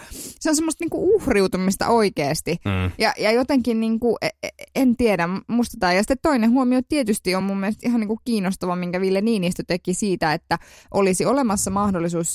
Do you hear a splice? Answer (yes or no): no